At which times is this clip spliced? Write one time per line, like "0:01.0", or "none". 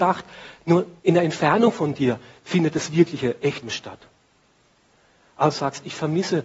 0:01.0
0:03.6
0:05.5